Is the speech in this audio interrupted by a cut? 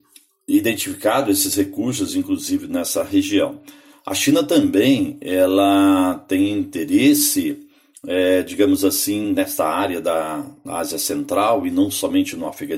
no; 0 cuts

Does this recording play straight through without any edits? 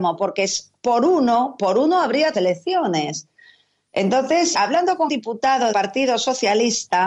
no; 4 cuts; at 2.3 s, 4.5 s, 5.1 s, 5.7 s

